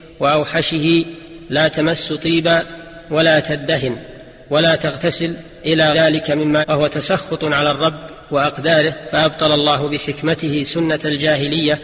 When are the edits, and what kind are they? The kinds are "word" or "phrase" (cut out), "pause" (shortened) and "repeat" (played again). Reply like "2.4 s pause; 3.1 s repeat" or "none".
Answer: 5.9 s word; 6.6 s word